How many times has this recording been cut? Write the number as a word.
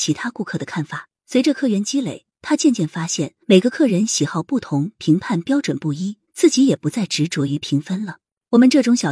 three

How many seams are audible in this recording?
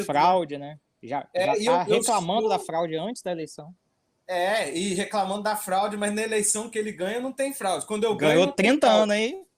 zero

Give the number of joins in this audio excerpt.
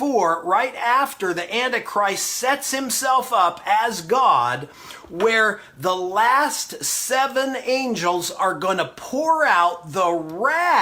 zero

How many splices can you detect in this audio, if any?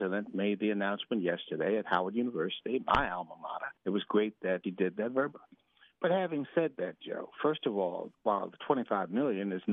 four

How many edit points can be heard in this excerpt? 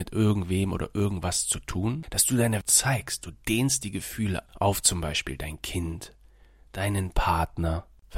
two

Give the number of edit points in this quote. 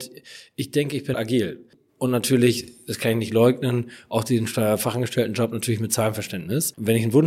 one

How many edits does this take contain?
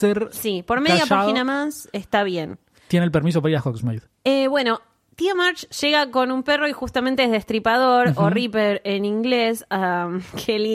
one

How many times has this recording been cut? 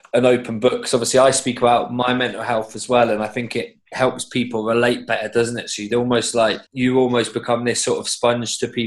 one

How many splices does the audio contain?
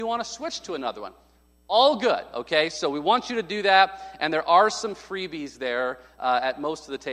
zero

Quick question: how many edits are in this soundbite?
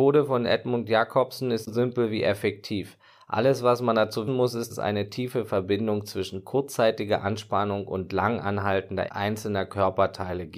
four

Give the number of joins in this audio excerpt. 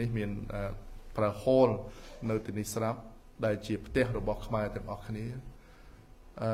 one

